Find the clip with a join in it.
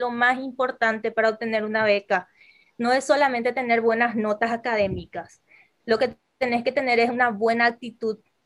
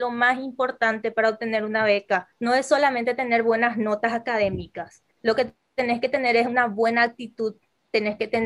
second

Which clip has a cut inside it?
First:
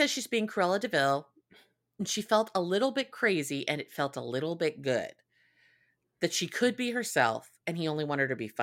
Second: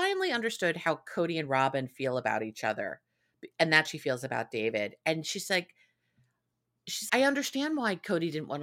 second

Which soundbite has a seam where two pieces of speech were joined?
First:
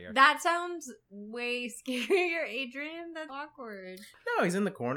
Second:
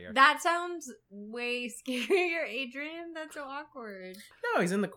first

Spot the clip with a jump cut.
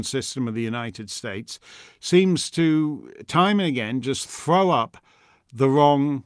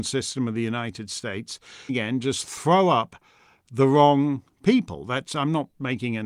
second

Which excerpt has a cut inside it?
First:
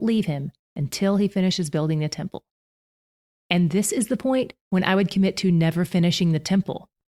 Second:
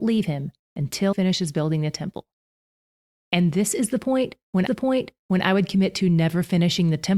second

